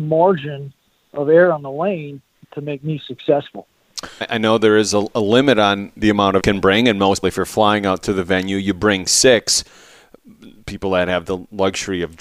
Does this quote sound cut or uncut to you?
cut